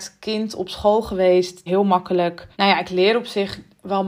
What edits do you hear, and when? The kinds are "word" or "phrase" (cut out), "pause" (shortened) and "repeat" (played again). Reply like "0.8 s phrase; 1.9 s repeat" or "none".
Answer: 1.7 s word; 2.5 s pause